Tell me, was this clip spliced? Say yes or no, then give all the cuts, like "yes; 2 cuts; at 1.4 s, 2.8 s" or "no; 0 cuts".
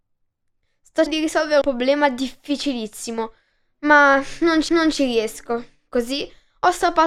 yes; 3 cuts; at 1.1 s, 1.6 s, 4.7 s